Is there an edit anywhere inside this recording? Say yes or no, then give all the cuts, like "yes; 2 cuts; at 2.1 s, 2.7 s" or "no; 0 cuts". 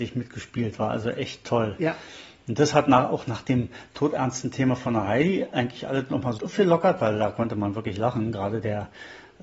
yes; 1 cut; at 6.4 s